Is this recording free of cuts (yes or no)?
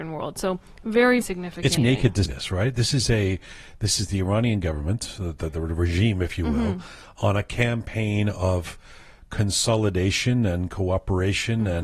no